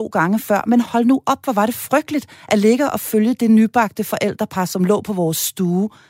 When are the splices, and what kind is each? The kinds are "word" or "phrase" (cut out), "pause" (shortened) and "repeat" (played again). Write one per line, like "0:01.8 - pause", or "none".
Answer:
none